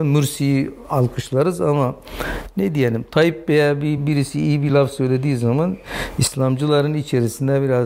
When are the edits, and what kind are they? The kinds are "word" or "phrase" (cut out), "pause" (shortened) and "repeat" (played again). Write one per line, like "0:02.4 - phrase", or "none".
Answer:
none